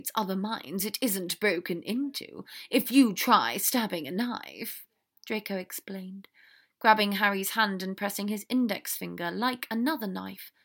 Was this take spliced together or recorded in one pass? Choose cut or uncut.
uncut